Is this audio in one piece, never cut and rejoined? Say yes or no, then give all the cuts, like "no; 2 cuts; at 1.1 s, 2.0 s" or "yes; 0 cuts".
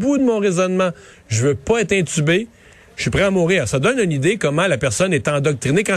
yes; 0 cuts